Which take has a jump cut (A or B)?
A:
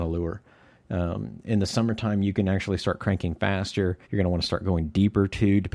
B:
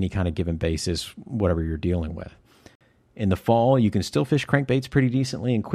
A